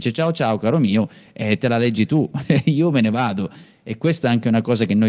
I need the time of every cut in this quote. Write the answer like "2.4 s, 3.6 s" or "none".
none